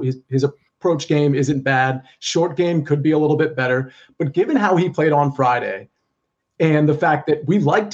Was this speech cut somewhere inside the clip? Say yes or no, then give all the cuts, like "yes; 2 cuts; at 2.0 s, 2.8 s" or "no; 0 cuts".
no; 0 cuts